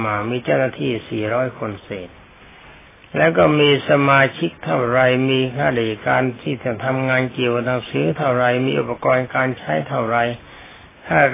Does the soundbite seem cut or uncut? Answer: uncut